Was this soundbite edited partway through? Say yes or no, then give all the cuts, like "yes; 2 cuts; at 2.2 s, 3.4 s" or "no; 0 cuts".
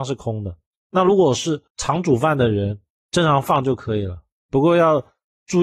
yes; 1 cut; at 1.7 s